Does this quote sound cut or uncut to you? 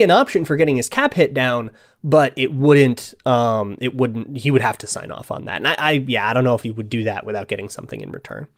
uncut